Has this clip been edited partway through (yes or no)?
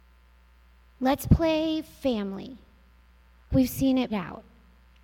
yes